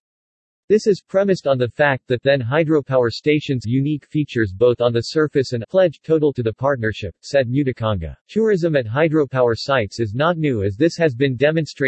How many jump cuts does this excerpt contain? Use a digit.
4